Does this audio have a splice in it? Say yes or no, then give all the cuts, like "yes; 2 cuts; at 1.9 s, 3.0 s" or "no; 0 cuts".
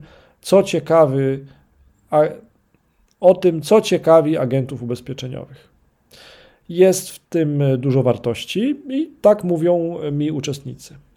no; 0 cuts